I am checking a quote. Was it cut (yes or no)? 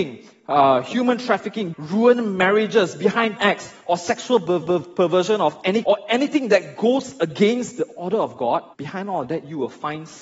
yes